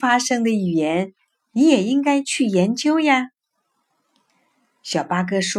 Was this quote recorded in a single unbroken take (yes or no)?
yes